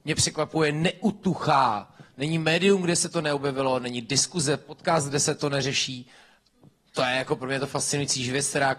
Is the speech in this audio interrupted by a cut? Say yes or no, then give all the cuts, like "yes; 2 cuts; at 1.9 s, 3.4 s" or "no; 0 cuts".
no; 0 cuts